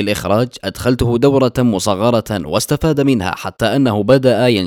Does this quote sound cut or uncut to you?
uncut